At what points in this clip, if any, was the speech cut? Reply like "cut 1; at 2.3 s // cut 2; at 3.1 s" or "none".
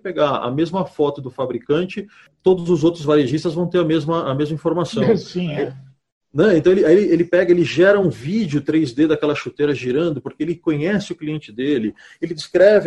none